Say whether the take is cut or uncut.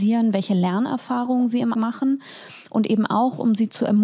cut